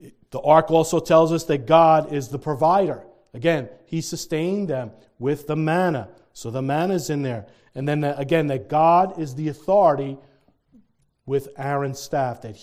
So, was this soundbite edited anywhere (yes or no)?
no